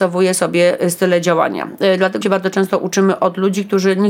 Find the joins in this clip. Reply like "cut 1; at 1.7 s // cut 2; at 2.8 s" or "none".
cut 1; at 2.2 s